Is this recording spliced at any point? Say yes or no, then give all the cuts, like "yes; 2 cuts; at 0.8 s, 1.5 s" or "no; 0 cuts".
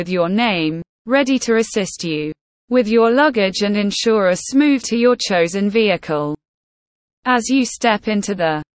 yes; 2 cuts; at 2.4 s, 4.8 s